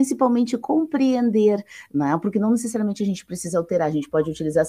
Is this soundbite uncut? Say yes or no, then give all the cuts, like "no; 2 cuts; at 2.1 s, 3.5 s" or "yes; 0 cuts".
yes; 0 cuts